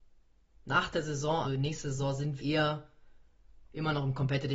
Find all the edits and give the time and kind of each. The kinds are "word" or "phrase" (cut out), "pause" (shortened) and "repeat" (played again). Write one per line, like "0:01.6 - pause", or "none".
0:01.4 - word
0:02.4 - word